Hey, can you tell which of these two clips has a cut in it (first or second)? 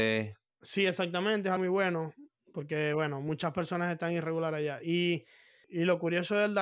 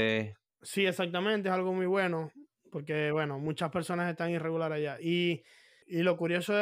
first